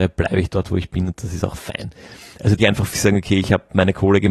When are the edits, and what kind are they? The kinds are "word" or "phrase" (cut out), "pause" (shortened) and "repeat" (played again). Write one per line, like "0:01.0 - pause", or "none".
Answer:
0:02.6 - phrase
0:02.9 - word